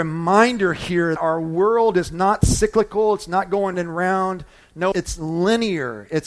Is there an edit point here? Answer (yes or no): yes